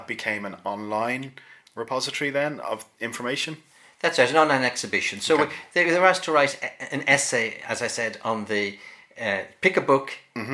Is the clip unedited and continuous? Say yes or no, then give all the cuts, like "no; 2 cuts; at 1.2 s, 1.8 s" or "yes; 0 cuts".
yes; 0 cuts